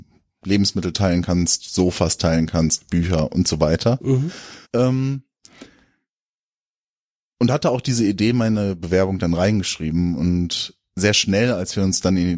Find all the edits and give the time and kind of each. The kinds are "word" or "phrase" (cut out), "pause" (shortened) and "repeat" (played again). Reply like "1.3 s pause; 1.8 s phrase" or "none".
4.6 s pause